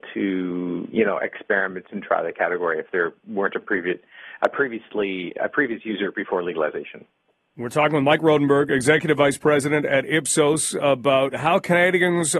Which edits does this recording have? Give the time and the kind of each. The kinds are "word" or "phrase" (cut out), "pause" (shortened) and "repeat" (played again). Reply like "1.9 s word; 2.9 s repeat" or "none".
5.3 s word